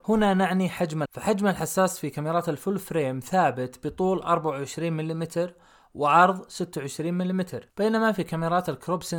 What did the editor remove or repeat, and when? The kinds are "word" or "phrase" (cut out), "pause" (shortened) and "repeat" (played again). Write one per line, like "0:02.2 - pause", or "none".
0:01.0 - word

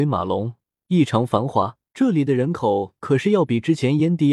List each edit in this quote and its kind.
0:01.9 - pause

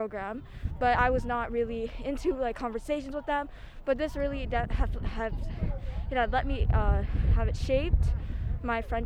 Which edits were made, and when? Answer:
none

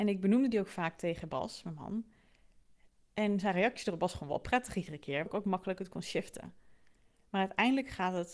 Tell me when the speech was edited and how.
0:05.3 - word

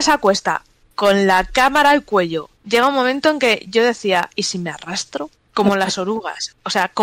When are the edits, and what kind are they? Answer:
0:02.6 - pause
0:05.4 - pause

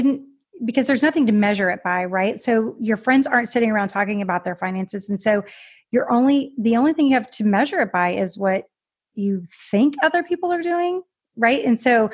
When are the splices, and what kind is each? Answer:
none

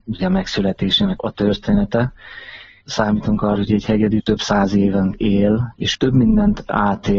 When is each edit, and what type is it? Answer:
0:01.2 - word
0:03.6 - word
0:05.1 - word
0:05.9 - word

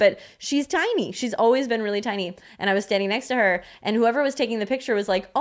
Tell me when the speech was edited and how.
none

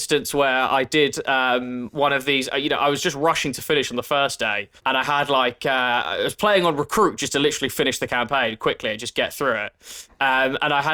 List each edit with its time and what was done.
0:04.8 - pause

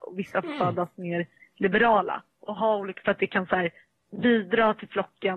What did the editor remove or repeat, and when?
0:03.0 - phrase

